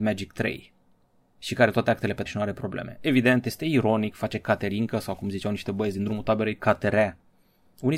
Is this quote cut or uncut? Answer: cut